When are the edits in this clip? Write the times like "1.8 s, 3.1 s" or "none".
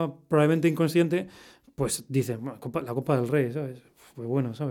none